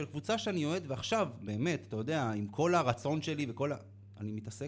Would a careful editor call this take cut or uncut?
uncut